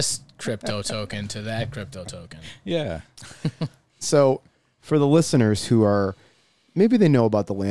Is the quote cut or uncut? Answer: uncut